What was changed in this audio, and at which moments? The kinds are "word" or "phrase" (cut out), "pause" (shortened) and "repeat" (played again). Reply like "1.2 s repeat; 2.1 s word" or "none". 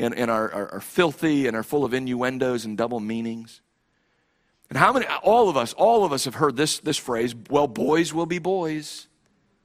none